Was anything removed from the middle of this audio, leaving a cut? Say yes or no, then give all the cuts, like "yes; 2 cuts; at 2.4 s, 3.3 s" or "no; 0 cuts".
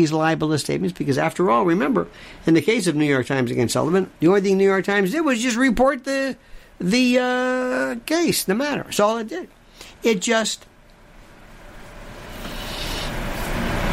no; 0 cuts